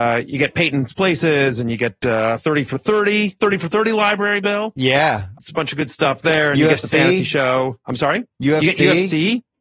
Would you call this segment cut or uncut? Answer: cut